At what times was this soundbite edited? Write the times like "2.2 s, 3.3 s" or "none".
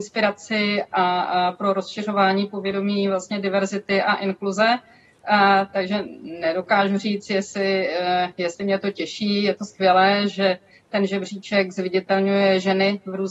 none